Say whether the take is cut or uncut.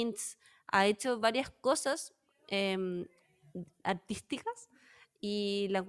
uncut